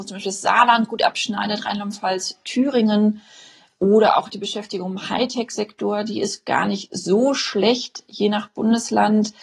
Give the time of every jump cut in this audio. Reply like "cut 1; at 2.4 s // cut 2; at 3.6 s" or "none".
none